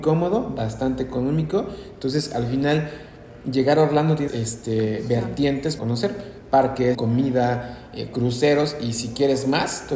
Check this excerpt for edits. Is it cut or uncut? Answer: cut